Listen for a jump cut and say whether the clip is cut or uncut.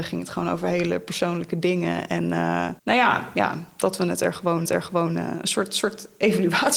cut